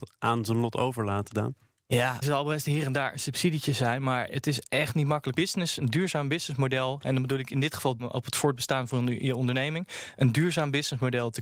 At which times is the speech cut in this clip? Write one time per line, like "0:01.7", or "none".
0:02.2
0:05.3
0:08.0

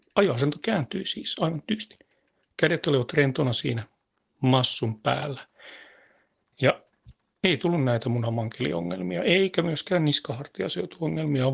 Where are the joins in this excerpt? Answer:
none

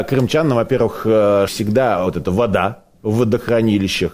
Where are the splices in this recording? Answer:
0:01.5
0:02.1

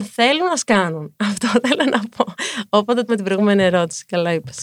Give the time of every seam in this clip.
0:03.1

